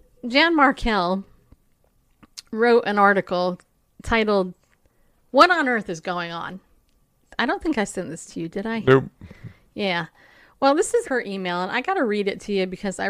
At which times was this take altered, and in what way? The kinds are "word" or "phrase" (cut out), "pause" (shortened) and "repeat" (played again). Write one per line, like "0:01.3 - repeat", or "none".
0:11.0 - word